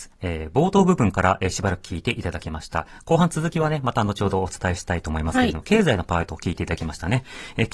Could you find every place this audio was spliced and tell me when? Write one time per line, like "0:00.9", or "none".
none